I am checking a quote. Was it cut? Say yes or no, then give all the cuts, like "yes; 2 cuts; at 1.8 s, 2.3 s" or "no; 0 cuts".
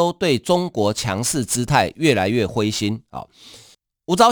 no; 0 cuts